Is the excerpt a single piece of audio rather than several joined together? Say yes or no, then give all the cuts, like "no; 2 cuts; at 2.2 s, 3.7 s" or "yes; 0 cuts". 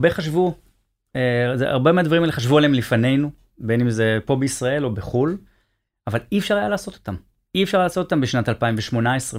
yes; 0 cuts